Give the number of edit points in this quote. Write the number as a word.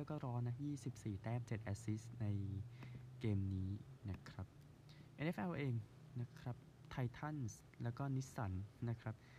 zero